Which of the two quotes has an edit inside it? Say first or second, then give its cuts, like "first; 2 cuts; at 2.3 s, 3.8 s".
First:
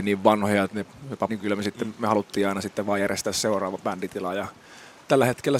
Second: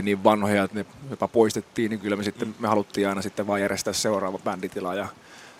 first; 1 cut; at 1.3 s